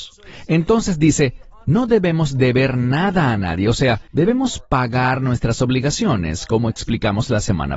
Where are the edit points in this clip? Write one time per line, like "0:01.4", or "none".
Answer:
0:04.1